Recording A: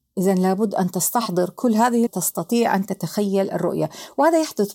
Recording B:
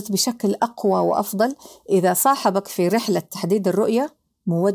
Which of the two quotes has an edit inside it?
A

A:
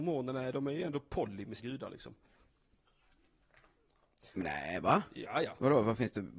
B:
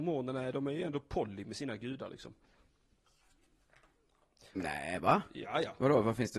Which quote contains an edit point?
A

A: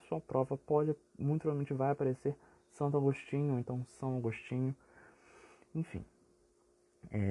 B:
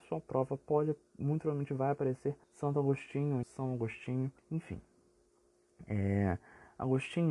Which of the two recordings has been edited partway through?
B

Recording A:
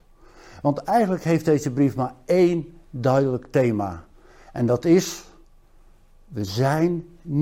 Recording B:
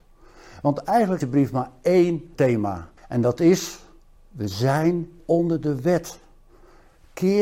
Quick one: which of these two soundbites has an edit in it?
B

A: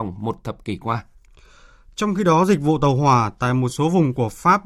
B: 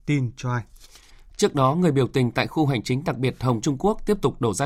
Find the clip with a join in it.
B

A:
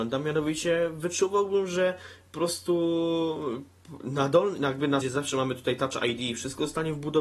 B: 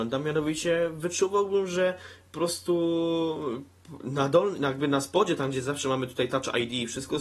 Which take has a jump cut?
A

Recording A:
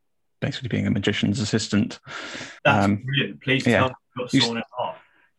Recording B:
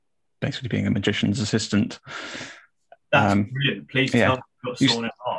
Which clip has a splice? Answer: A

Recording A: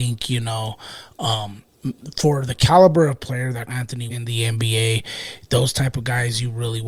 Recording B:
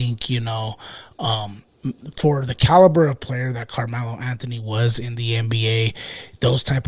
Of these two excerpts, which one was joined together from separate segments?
A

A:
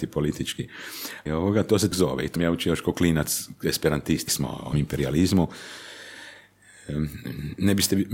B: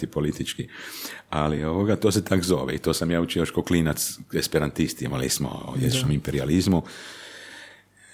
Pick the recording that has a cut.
A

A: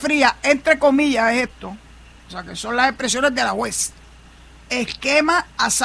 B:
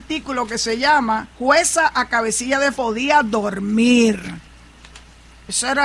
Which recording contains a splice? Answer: B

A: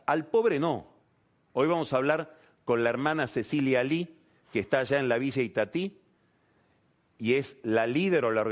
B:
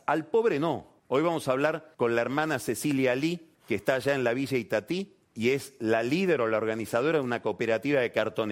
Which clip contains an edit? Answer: B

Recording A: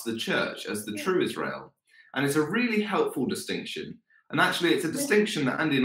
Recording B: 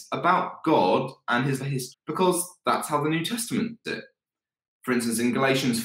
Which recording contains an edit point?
B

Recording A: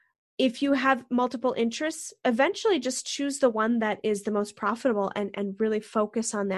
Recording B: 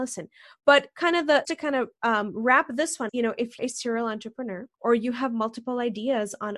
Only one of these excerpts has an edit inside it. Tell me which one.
B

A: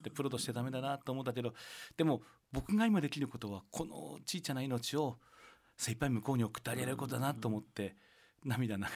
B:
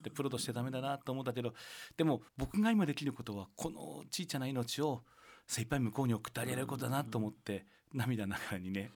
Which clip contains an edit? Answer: B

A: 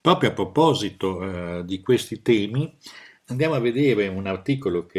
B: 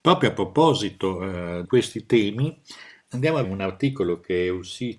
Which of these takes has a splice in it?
B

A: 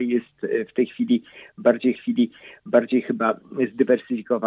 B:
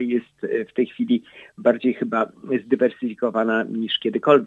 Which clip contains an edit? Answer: A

